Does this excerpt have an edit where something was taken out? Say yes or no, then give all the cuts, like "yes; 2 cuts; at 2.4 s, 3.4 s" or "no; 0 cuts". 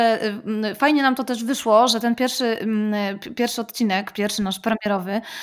no; 0 cuts